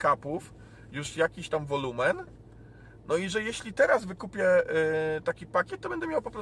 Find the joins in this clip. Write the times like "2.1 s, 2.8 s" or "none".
none